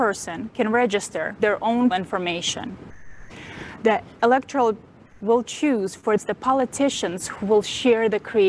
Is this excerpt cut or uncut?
cut